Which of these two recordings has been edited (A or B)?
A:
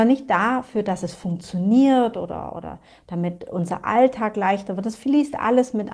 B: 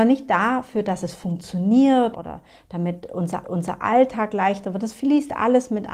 B